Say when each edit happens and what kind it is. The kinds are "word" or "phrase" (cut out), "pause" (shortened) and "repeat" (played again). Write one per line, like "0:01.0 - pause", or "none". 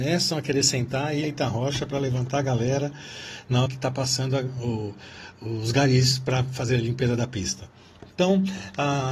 0:01.2 - phrase
0:03.7 - word
0:05.3 - word